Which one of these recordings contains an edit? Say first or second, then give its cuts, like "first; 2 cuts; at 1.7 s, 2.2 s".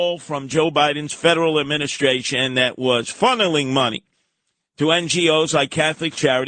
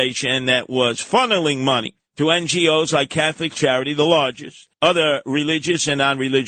second; 2 cuts; at 2.0 s, 4.7 s